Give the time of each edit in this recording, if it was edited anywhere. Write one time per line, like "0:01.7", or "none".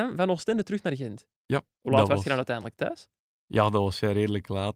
none